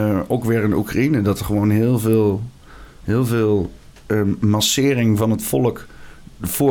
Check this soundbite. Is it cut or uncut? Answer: uncut